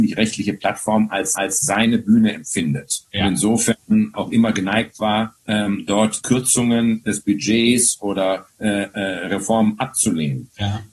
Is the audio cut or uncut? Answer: cut